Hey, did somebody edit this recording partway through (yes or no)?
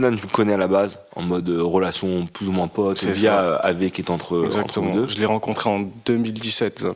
no